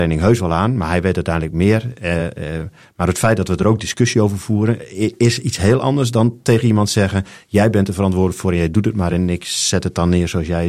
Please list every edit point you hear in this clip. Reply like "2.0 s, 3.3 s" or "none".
none

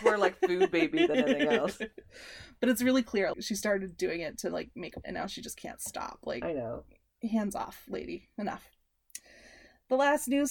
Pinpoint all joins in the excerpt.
3.3 s, 5.0 s

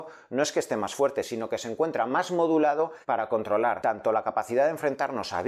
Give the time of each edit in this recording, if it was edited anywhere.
3.0 s

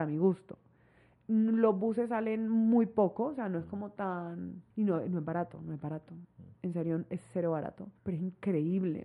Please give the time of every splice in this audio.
4.7 s, 8.0 s

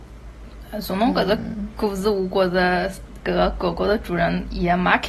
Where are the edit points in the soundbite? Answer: 3.2 s

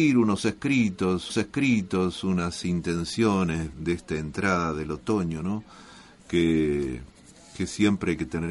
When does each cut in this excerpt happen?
1.3 s, 3.7 s

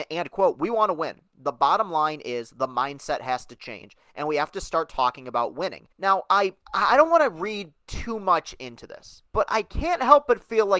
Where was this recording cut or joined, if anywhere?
5.9 s, 6.6 s, 9.3 s

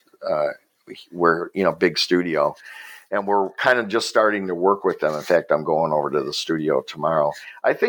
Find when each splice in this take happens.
none

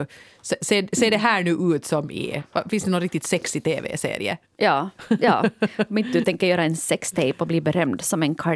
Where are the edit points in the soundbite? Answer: none

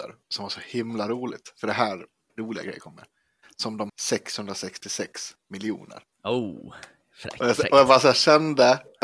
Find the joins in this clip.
2.3 s, 3.9 s, 6.1 s

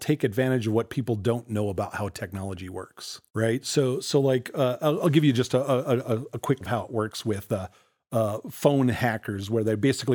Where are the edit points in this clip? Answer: 3.3 s, 6.6 s

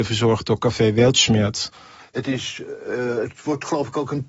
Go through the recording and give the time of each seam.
none

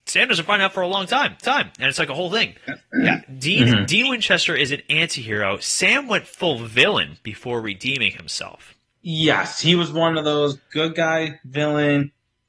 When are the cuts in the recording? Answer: 1.4 s, 2.6 s, 8.9 s

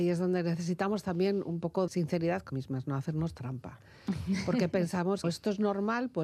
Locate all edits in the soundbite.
1.9 s, 2.5 s, 5.2 s

